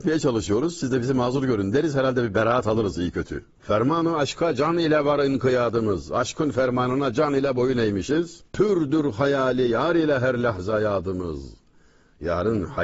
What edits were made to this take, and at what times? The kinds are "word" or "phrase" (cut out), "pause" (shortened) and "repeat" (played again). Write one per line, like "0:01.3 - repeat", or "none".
0:03.5 - pause
0:08.5 - pause